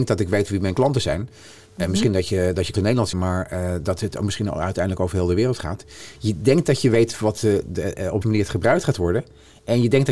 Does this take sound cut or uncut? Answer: cut